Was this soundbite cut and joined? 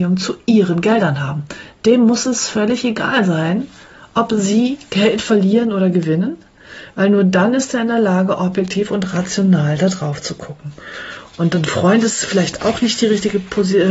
no; 0 cuts

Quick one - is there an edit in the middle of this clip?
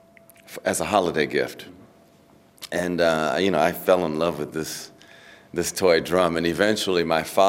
no; 0 cuts

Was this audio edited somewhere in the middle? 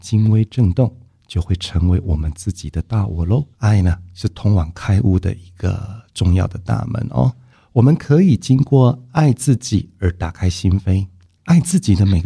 yes; 1 cut; at 3.5 s

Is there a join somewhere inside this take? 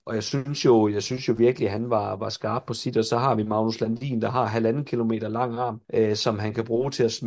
yes; 1 cut; at 5.8 s

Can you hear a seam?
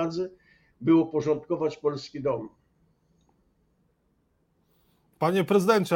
no; 0 cuts

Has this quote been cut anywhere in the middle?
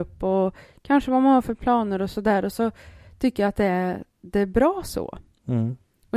no; 0 cuts

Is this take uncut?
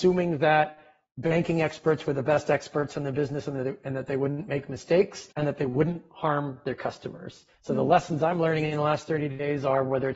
no; 2 cuts; at 5.3 s, 7.5 s

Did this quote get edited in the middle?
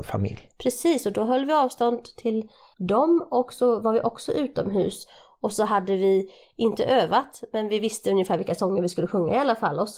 no; 0 cuts

